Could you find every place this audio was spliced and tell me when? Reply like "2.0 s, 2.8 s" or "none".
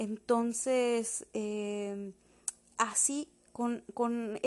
2.7 s